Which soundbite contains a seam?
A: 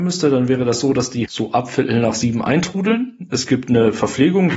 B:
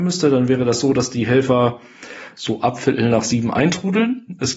A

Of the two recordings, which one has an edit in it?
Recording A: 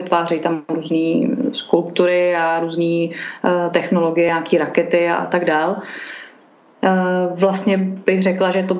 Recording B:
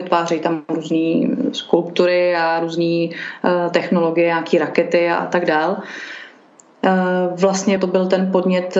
B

